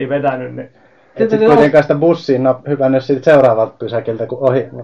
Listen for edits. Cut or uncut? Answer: uncut